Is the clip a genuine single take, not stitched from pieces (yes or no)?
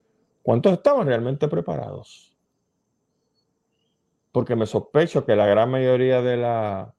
yes